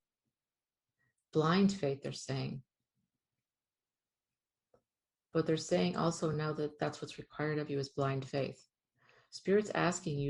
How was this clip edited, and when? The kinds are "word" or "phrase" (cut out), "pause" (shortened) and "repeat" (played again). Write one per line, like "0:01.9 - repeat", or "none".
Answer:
none